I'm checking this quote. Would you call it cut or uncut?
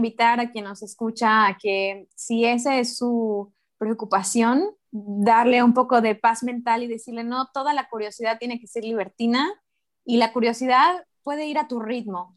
uncut